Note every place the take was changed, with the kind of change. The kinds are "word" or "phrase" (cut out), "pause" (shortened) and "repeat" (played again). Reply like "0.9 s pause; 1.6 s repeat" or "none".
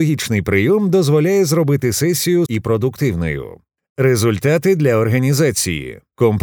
2.5 s word